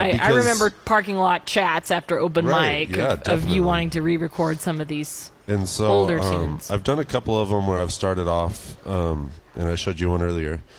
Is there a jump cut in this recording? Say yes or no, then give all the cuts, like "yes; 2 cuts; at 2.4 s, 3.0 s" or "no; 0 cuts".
no; 0 cuts